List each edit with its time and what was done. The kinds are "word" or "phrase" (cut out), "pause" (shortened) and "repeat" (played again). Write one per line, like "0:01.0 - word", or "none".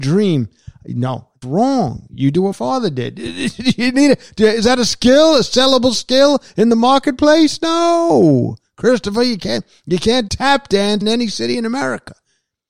0:01.4 - word
0:02.5 - word
0:10.3 - word
0:11.0 - word